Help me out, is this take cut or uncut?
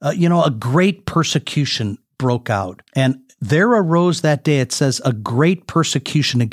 cut